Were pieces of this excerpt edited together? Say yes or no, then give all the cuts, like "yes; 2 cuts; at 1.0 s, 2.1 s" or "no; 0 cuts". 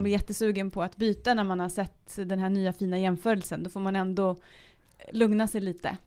no; 0 cuts